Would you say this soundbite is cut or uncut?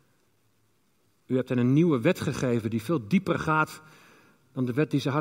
uncut